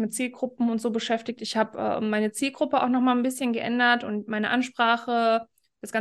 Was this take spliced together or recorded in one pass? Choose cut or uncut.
uncut